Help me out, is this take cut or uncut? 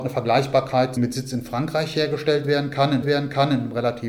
cut